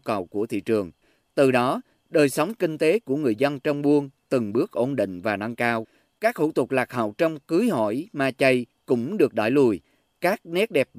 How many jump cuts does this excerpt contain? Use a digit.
0